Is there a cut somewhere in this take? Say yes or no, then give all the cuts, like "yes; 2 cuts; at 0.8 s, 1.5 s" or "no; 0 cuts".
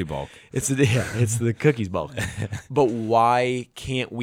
no; 0 cuts